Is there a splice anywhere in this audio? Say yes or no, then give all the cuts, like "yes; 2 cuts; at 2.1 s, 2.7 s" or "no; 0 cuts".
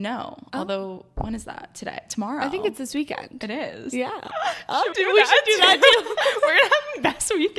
yes; 1 cut; at 4.9 s